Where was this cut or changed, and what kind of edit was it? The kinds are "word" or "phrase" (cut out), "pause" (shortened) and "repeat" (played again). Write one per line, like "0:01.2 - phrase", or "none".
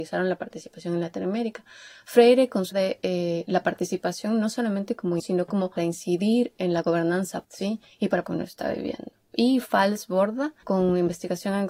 0:02.7 - word
0:05.2 - word
0:05.8 - phrase
0:07.4 - word
0:08.2 - phrase